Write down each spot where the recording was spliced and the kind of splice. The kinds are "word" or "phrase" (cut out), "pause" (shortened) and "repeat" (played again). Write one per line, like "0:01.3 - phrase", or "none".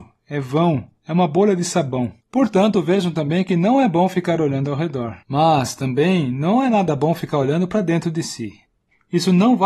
0:02.2 - pause
0:05.2 - pause